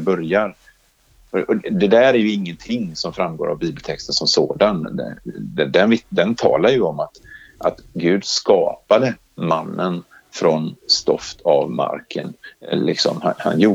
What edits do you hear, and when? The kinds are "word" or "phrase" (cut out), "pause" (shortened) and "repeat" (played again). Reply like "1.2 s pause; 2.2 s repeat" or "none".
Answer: none